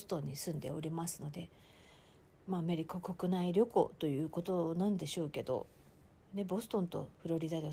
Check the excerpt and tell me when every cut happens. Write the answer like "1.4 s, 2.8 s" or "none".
none